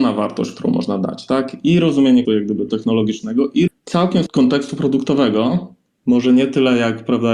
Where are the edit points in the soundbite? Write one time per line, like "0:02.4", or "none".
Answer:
0:02.2
0:02.7
0:03.7
0:04.3